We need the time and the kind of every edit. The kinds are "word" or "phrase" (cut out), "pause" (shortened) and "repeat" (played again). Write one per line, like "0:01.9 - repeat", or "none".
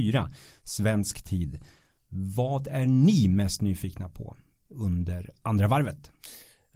none